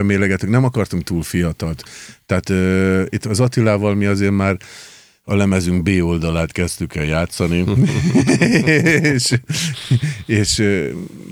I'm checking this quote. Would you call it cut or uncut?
uncut